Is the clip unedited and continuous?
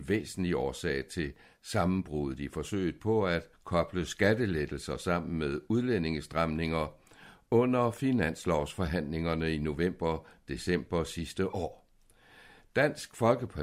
no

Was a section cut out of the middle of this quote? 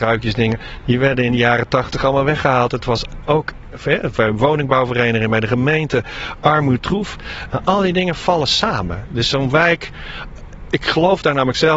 no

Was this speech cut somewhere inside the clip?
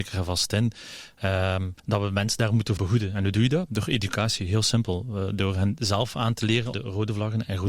yes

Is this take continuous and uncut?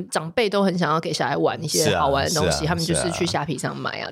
yes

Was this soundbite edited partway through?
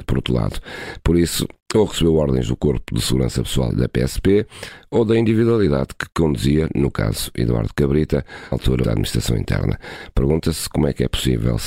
yes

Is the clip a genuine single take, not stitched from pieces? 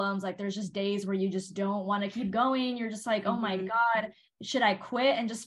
yes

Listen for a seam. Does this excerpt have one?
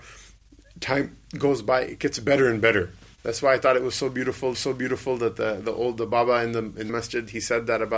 yes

